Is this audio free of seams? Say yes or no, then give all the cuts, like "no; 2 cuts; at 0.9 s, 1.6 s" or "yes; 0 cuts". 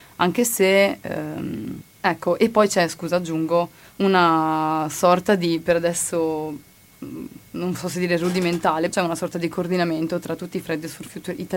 no; 4 cuts; at 1.9 s, 3.9 s, 7.5 s, 8.9 s